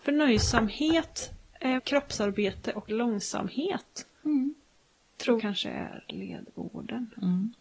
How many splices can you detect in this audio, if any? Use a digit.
3